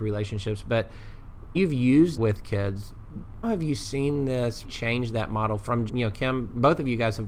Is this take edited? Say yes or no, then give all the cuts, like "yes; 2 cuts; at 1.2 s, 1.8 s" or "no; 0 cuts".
yes; 5 cuts; at 1.6 s, 2.2 s, 3.4 s, 4.6 s, 5.9 s